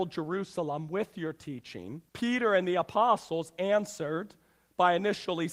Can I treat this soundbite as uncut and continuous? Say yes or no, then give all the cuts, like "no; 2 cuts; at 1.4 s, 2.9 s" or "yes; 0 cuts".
no; 1 cut; at 2.1 s